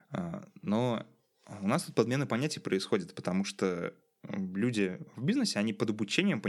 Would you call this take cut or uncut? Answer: uncut